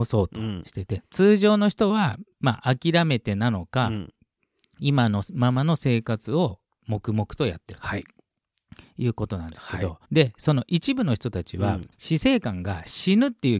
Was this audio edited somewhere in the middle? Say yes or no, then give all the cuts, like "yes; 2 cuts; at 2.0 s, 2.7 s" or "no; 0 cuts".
yes; 4 cuts; at 1.0 s, 2.3 s, 10.0 s, 11.9 s